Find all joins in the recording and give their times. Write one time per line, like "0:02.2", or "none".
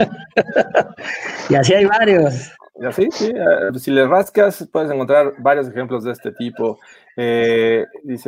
none

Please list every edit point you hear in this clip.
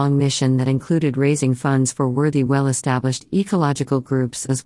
none

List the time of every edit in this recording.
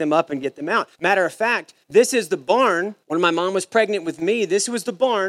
0:00.9
0:01.8
0:03.0

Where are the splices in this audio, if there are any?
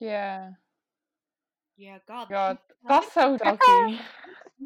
0:02.3
0:03.4

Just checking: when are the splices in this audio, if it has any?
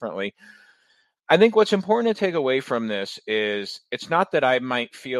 none

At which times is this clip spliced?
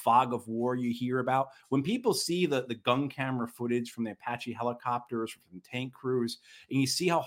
none

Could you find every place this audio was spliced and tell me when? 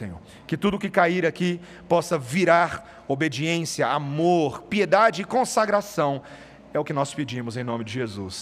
none

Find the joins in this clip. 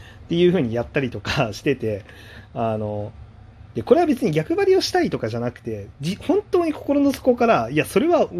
none

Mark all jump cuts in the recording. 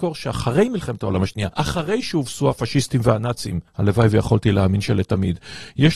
0:01.5
0:03.7

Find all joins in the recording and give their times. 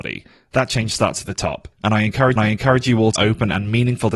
0:01.7
0:02.4
0:03.2

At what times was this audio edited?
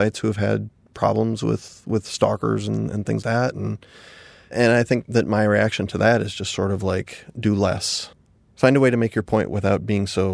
0:03.2

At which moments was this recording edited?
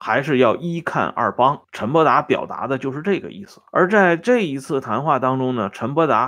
0:01.6
0:03.7

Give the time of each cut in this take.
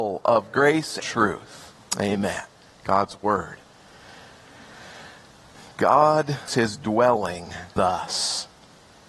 0:01.0
0:06.5
0:07.8

